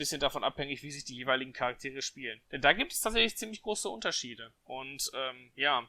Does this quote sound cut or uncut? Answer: cut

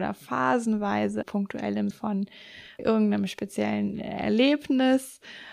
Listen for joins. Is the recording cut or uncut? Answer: cut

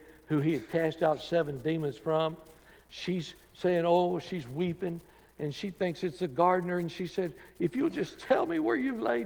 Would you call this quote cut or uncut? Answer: uncut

